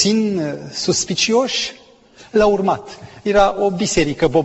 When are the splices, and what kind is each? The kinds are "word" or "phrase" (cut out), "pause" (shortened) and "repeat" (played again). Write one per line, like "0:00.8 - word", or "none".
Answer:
none